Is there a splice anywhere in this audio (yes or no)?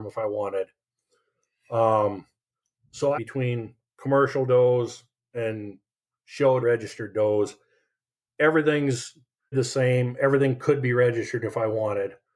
yes